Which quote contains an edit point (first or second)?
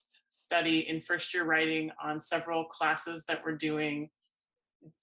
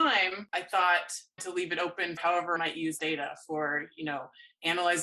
second